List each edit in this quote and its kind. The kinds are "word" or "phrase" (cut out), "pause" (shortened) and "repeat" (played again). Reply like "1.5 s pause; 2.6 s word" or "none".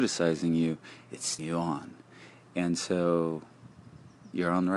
1.4 s word